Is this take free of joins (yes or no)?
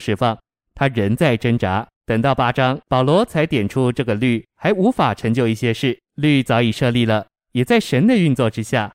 no